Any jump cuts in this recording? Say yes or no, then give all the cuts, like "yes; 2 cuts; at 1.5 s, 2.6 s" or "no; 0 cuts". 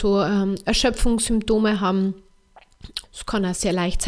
yes; 1 cut; at 3.0 s